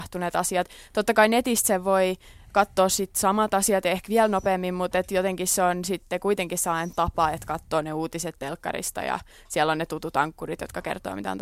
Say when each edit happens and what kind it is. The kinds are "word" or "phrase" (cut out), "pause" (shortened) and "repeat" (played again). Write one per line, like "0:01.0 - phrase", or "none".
none